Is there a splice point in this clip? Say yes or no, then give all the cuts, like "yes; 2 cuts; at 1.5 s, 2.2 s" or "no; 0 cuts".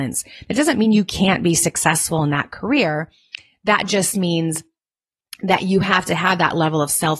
no; 0 cuts